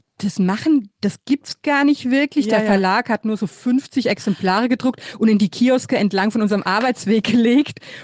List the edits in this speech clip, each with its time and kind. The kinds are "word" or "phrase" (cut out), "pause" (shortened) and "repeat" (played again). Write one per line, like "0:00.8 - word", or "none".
none